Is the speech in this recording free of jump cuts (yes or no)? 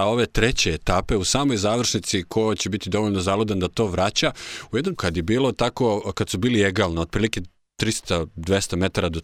no